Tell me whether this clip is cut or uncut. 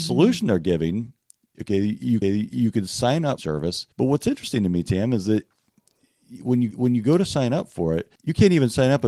cut